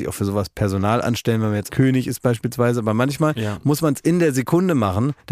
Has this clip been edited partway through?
yes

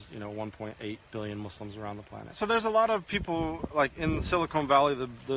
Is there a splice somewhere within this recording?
no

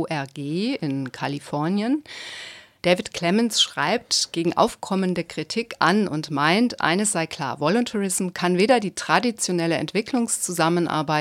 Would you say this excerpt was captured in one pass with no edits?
yes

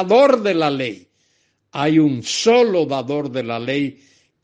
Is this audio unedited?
yes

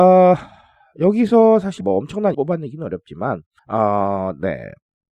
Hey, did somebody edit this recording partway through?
yes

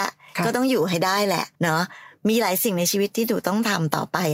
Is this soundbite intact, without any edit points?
no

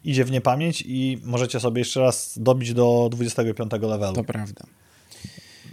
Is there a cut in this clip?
no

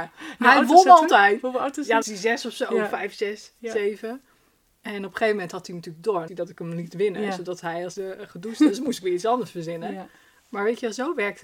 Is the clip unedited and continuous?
no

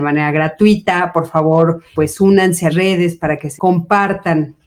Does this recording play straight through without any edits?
no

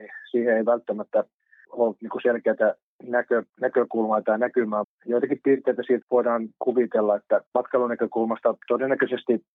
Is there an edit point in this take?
yes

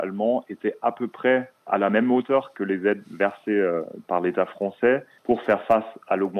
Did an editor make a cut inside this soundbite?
yes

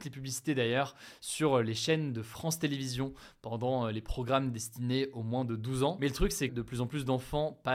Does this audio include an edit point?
yes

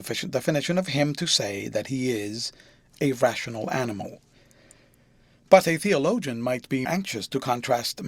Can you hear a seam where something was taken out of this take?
yes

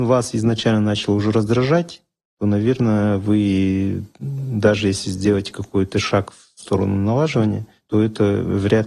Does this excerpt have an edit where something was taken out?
no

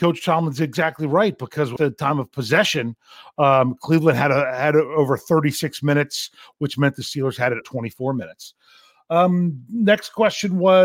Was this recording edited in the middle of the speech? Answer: yes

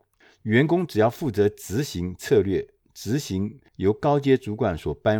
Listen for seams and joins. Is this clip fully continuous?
no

